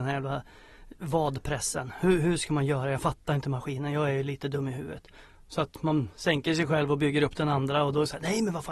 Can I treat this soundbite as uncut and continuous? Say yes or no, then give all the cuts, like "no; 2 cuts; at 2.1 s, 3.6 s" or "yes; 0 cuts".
yes; 0 cuts